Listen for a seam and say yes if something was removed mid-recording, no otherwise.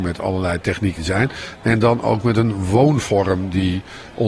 yes